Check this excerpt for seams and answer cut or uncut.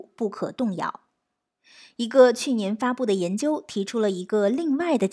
uncut